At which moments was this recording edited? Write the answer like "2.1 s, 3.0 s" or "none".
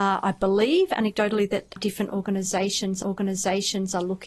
1.8 s, 3.0 s